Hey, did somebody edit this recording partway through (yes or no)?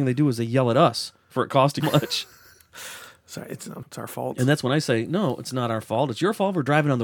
yes